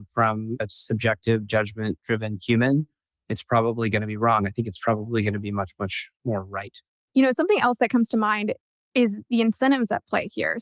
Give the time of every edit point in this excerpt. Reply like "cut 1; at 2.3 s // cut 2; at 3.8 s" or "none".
none